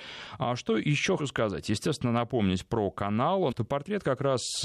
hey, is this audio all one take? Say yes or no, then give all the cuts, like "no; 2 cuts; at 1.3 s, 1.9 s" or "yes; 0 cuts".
no; 2 cuts; at 1.2 s, 3.5 s